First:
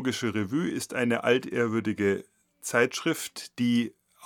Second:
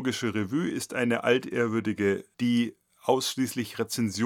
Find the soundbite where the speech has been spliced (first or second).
second